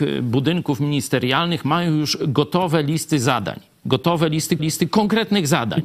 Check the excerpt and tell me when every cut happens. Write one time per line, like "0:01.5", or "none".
0:04.6